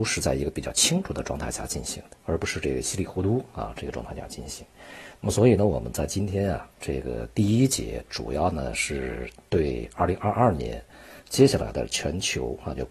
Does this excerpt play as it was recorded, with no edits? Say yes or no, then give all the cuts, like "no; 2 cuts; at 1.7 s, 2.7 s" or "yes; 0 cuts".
no; 1 cut; at 2.2 s